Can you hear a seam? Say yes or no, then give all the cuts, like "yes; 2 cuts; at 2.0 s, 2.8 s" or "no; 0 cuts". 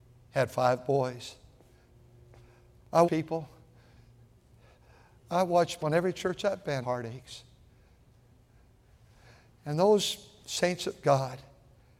yes; 3 cuts; at 3.0 s, 5.8 s, 6.8 s